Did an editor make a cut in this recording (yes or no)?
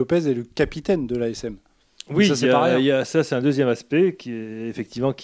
no